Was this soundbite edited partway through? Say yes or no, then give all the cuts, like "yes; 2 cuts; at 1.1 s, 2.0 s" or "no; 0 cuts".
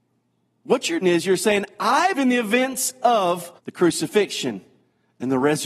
yes; 3 cuts; at 1.0 s, 2.1 s, 3.6 s